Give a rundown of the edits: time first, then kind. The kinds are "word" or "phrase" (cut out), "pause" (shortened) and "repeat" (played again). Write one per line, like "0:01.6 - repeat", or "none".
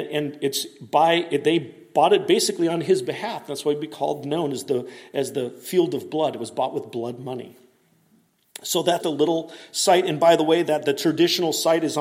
0:09.0 - word